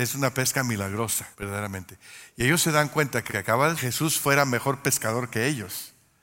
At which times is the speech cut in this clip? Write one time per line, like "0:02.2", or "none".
0:01.3
0:03.3
0:03.8